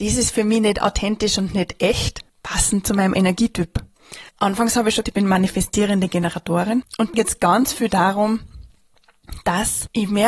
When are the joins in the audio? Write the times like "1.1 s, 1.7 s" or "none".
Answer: 2.3 s, 4.3 s, 5.0 s, 7.1 s